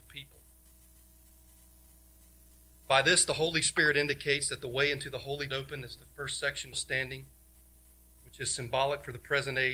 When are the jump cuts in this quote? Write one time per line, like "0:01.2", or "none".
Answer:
0:05.5
0:06.0
0:06.7

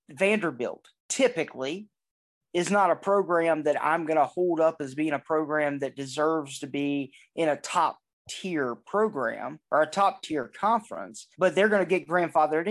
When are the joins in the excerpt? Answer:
0:01.0
0:09.6
0:11.3

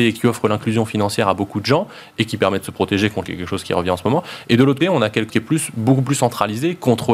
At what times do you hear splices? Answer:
0:03.2
0:04.8
0:05.3

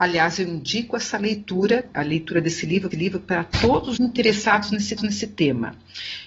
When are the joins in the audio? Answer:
0:01.9
0:02.9
0:04.0
0:05.0

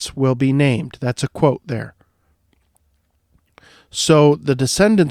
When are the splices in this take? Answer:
none

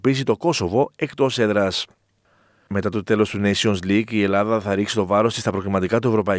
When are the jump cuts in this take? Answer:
none

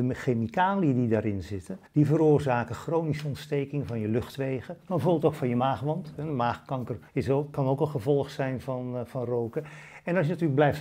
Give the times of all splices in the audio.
0:01.9
0:07.1

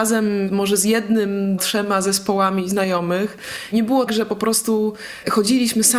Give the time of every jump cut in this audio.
0:01.6
0:04.1

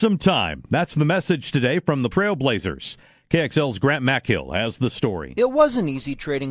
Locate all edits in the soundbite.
0:02.1

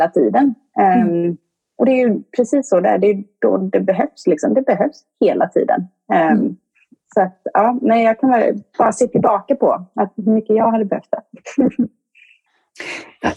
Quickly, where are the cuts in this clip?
none

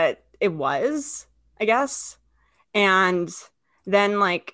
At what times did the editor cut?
none

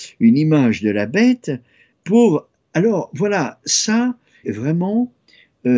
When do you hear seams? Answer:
0:01.9
0:04.4

